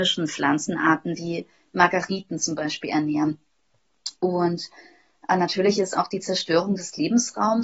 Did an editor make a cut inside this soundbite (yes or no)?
no